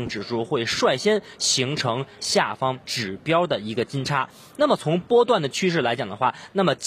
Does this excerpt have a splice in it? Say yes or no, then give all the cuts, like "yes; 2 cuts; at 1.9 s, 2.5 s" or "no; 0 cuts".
yes; 1 cut; at 2.8 s